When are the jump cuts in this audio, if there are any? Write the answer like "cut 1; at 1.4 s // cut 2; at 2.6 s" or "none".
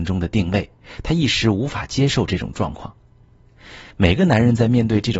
cut 1; at 3.9 s